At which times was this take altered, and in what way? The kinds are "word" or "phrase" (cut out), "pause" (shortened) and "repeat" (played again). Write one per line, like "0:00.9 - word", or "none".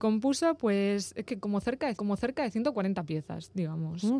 0:01.2 - word
0:02.0 - repeat